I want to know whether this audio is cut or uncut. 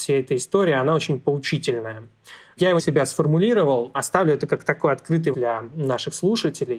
cut